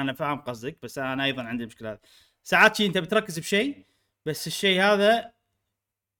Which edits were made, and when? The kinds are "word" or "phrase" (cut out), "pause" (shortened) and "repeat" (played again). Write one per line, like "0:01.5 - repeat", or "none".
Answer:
none